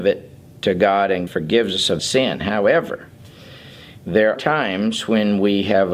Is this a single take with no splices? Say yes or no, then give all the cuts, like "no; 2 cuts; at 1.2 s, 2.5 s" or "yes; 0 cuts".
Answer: no; 3 cuts; at 1.3 s, 2.0 s, 4.4 s